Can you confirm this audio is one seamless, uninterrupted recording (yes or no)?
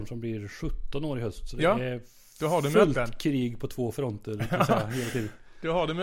yes